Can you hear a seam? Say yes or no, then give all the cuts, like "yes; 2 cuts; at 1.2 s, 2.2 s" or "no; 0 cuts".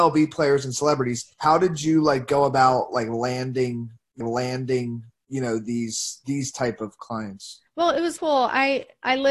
yes; 4 cuts; at 1.3 s, 4.2 s, 7.7 s, 8.2 s